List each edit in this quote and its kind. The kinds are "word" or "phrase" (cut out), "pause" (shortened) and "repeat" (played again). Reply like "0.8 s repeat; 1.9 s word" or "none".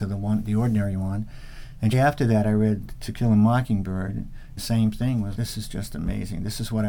1.9 s word; 4.6 s word; 5.3 s word